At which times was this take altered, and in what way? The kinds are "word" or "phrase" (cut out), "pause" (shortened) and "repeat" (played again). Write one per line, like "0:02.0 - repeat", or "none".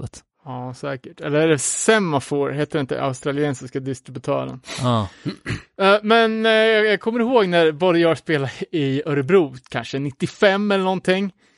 none

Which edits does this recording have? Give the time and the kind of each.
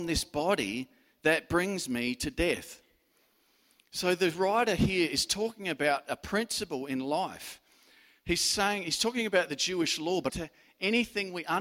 0:10.3 - phrase

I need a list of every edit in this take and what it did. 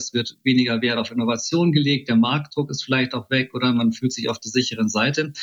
none

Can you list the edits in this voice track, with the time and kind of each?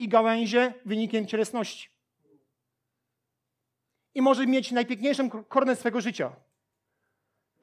none

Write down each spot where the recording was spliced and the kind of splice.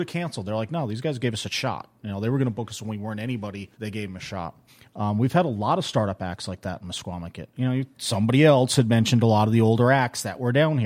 0:03.7 - pause
0:04.7 - pause
0:07.9 - pause

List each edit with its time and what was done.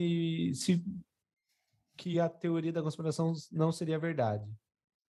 none

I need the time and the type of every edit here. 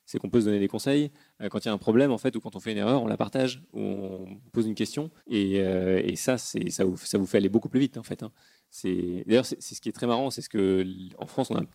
0:04.5 - pause
0:05.2 - pause

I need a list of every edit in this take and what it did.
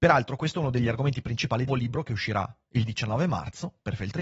0:01.7 - phrase

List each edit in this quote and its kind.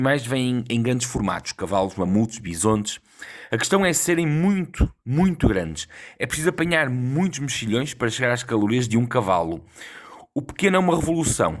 0:05.0 - pause

